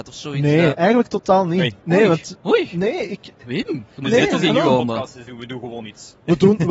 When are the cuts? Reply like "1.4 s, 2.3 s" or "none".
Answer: none